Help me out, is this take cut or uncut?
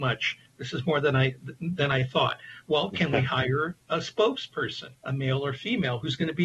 cut